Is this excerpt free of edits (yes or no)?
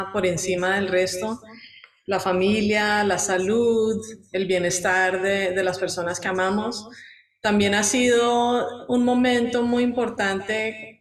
yes